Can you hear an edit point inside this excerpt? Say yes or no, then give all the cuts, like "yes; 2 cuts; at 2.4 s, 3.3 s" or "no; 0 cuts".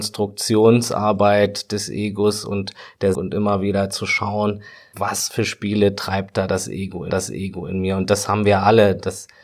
yes; 3 cuts; at 3.1 s, 4.9 s, 7.1 s